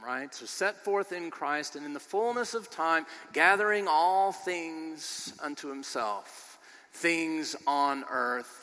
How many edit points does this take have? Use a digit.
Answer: 0